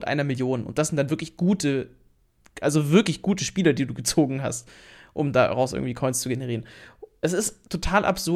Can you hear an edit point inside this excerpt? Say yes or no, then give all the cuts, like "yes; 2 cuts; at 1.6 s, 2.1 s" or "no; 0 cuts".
no; 0 cuts